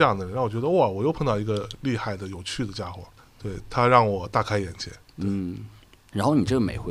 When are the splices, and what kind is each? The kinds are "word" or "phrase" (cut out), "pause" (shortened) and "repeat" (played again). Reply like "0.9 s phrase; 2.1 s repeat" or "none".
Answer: 3.2 s pause